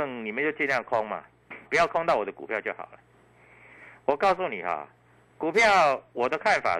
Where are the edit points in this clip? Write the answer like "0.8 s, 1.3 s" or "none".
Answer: 1.7 s